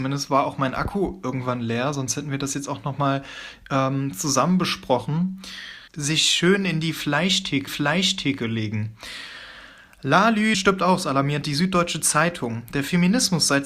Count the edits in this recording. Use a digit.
3